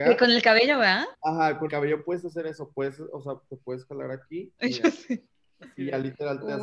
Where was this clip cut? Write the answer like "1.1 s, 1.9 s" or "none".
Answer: 1.1 s, 1.7 s, 5.3 s